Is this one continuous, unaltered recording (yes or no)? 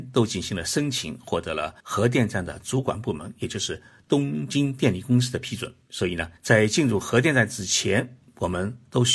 no